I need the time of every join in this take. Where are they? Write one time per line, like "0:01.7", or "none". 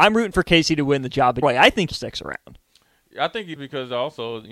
0:01.4
0:01.9
0:03.6